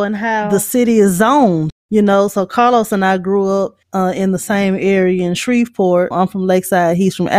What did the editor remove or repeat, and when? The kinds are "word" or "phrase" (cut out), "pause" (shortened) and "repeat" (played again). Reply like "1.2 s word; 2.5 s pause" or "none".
3.8 s pause